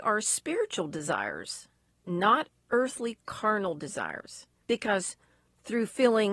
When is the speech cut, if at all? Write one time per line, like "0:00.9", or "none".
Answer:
0:04.6